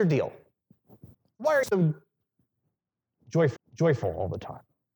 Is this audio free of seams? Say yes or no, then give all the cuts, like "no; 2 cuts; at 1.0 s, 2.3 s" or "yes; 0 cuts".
no; 3 cuts; at 1.1 s, 1.6 s, 3.6 s